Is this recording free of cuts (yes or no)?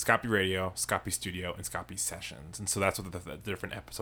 yes